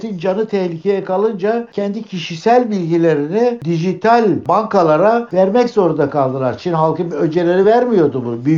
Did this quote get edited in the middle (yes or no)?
no